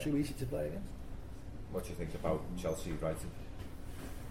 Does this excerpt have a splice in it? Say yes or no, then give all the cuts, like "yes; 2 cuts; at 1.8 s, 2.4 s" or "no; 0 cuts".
no; 0 cuts